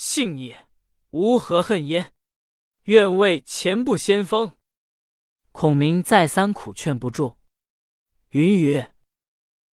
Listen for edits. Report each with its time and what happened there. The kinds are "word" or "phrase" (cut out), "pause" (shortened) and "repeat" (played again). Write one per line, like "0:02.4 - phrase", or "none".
none